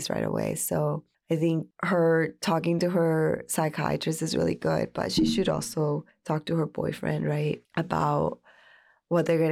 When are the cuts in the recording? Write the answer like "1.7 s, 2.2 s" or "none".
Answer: 1.1 s, 6.1 s